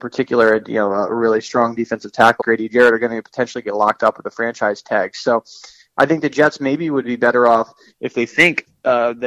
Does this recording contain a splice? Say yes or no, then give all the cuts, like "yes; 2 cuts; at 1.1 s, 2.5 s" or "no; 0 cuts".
yes; 1 cut; at 2.4 s